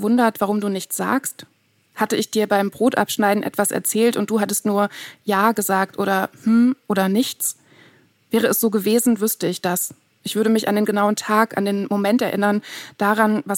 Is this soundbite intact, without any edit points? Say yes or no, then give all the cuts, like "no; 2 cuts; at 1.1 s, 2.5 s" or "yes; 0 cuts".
yes; 0 cuts